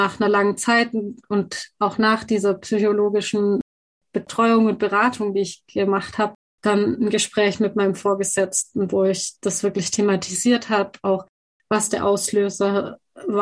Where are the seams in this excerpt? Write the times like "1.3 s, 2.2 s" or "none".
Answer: none

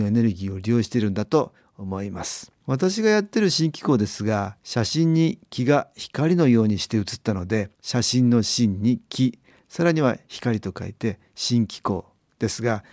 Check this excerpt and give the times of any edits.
2.6 s, 4.6 s, 7.7 s

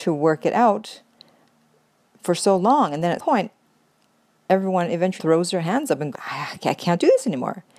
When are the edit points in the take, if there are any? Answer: 3.2 s, 5.2 s, 6.1 s

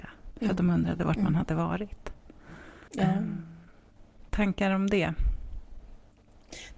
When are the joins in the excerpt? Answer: 2.9 s, 4.3 s

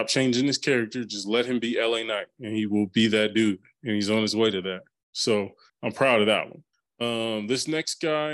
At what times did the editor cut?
5.7 s, 6.7 s

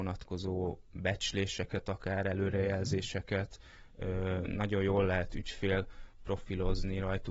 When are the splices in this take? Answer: none

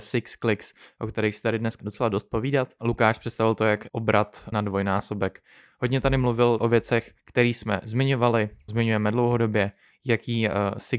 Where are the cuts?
1.8 s, 3.9 s, 4.5 s, 6.6 s, 7.2 s, 8.7 s

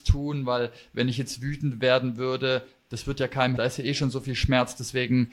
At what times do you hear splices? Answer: 3.6 s

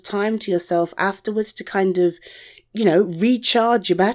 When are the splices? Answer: none

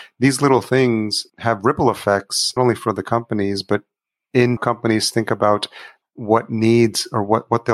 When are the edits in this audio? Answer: 1.3 s, 2.6 s, 4.6 s, 6.0 s

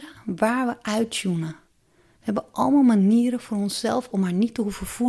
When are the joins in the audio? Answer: 4.1 s

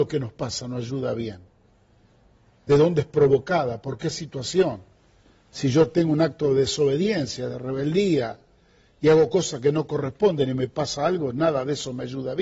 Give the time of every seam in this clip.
none

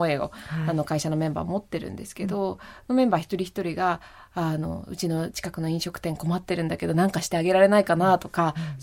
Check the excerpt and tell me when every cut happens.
none

